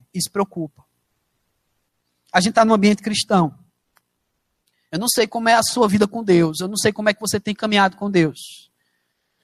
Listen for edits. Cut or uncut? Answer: uncut